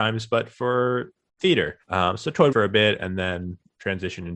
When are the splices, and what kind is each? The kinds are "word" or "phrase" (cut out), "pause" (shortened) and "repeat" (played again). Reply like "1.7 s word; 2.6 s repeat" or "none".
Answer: 1.8 s pause; 2.5 s phrase